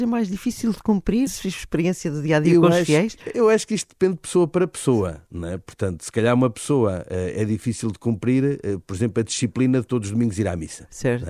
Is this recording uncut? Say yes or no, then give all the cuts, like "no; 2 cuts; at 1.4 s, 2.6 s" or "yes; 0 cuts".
no; 1 cut; at 1.3 s